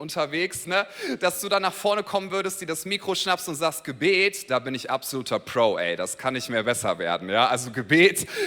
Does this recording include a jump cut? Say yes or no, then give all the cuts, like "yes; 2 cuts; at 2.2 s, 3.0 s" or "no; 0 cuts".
no; 0 cuts